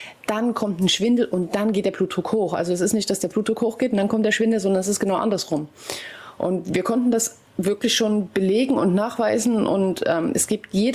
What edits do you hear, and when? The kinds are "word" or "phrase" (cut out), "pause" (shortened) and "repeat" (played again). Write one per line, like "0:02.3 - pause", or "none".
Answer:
none